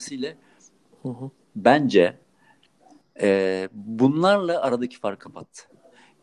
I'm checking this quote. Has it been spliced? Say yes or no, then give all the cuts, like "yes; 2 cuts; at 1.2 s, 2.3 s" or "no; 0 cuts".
no; 0 cuts